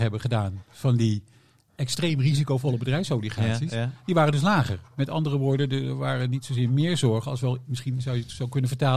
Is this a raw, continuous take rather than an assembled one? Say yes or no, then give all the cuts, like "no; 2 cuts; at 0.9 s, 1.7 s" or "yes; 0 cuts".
yes; 0 cuts